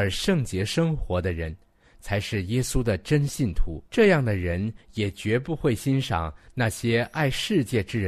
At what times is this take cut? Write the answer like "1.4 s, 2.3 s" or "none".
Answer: 3.9 s